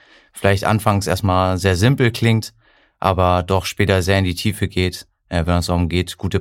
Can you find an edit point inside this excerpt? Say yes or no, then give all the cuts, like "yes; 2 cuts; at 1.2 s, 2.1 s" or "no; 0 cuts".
no; 0 cuts